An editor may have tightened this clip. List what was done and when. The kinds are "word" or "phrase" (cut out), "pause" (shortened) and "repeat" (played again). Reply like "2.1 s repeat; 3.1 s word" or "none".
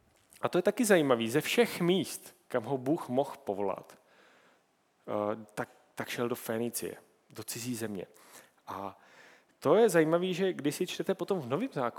none